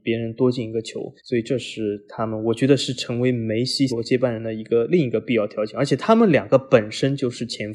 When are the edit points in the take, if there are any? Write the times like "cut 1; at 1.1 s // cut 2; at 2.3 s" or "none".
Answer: cut 1; at 1.2 s // cut 2; at 3.9 s